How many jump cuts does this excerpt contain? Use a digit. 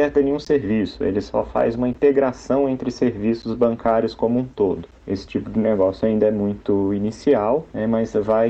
0